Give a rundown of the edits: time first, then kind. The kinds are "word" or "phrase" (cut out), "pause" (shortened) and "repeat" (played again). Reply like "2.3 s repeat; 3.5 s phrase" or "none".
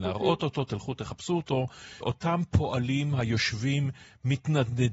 2.0 s word